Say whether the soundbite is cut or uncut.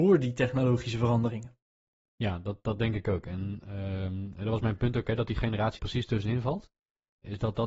cut